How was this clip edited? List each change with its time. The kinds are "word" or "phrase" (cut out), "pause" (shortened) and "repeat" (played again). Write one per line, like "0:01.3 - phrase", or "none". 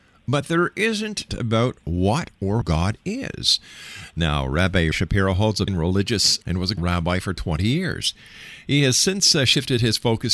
0:01.3 - word
0:02.6 - word
0:04.9 - word
0:05.7 - word
0:06.4 - word
0:06.8 - word